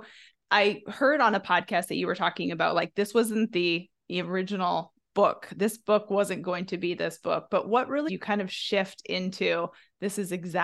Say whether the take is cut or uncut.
cut